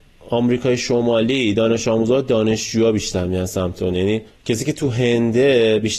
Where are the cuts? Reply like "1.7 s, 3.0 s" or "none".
4.3 s